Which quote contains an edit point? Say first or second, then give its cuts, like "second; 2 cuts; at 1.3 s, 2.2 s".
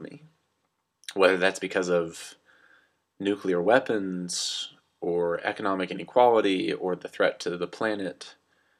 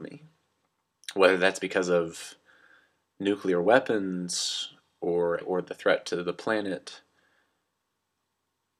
second; 1 cut; at 5.4 s